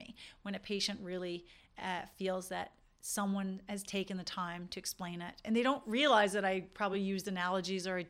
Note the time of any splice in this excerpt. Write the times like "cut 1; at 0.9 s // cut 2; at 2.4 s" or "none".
none

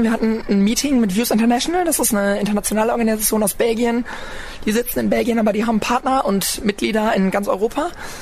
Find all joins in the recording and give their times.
none

